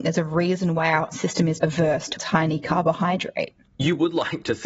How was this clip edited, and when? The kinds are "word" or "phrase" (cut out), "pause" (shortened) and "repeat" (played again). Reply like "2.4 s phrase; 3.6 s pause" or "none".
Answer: 1.1 s word; 1.6 s word; 2.2 s word

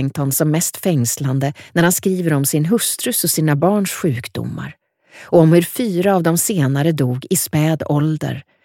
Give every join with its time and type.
none

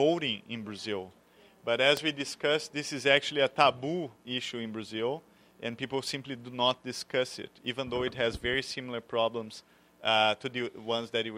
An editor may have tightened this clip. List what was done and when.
none

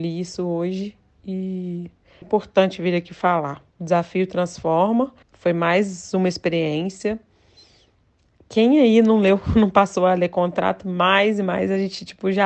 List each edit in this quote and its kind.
2.2 s word; 3.7 s pause; 5.2 s pause

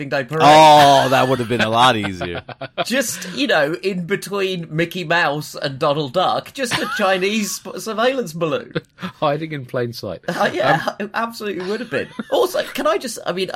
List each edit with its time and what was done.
none

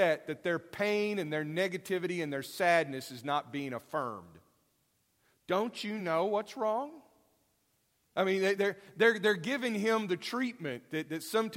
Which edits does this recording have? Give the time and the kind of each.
none

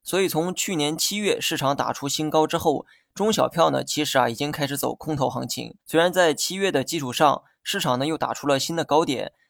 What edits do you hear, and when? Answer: 5.8 s pause

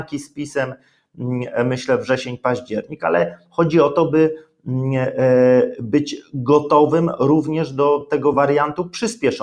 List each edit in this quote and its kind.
none

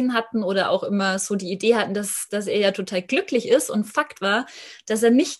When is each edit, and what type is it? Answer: none

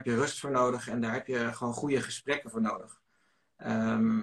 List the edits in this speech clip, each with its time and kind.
none

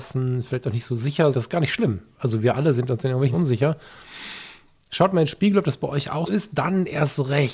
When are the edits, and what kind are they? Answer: 1.3 s word; 3.3 s word; 6.3 s word

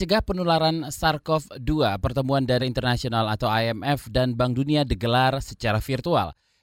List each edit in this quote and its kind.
2.6 s word

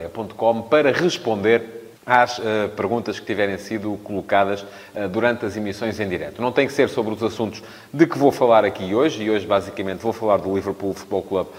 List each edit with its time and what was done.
2.0 s pause

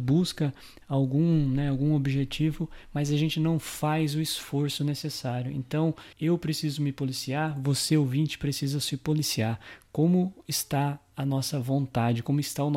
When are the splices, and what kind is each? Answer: 6.1 s pause

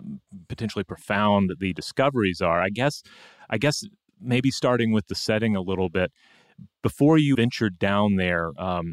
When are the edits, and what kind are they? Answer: 7.3 s word

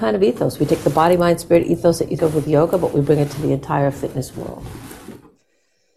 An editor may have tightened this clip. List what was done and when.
2.2 s word

